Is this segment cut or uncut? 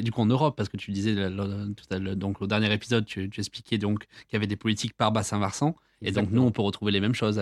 uncut